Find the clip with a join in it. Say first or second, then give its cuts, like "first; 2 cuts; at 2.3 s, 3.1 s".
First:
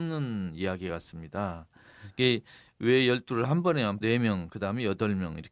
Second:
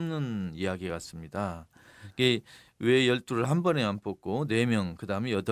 first; 1 cut; at 4.0 s